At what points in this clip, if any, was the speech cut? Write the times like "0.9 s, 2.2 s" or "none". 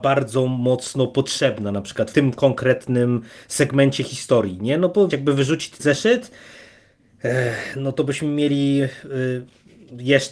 2.1 s, 5.1 s, 5.8 s